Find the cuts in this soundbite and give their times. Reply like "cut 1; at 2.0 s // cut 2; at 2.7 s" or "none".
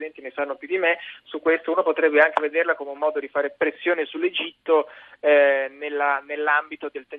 none

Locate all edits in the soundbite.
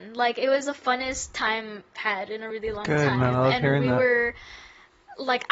cut 1; at 2.0 s // cut 2; at 2.5 s

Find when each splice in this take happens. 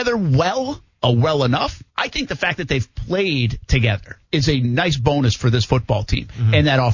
cut 1; at 1.9 s // cut 2; at 4.2 s

